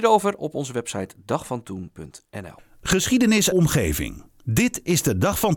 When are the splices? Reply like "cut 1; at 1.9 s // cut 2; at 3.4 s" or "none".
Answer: cut 1; at 3.5 s